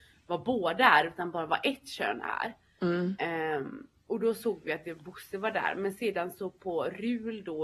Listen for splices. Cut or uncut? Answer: uncut